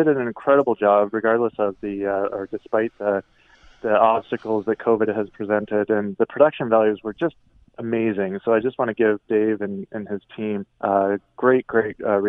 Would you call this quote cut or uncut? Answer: cut